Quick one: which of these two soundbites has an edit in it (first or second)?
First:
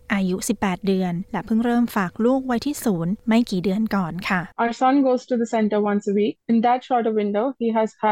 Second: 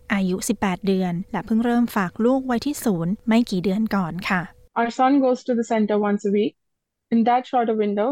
first